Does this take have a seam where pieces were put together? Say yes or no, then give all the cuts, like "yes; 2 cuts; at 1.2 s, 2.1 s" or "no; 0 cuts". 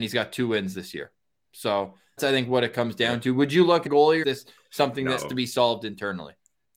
yes; 4 cuts; at 2.2 s, 3.9 s, 4.2 s, 5.2 s